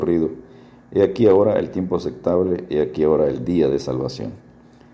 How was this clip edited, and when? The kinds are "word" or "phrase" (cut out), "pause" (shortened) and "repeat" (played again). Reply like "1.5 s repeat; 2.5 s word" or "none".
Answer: none